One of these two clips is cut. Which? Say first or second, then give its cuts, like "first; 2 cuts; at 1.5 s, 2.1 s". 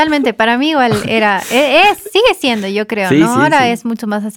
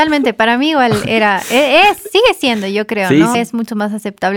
second; 1 cut; at 3.3 s